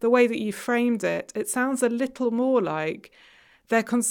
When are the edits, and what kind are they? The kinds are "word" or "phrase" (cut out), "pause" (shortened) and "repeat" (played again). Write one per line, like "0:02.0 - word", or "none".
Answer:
none